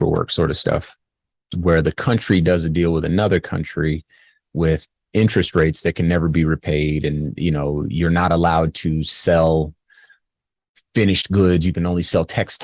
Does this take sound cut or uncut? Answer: uncut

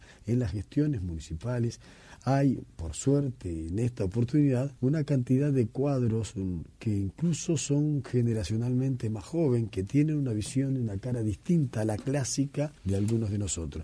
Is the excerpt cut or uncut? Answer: cut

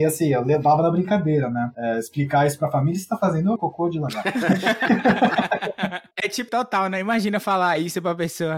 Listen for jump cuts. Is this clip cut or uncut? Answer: cut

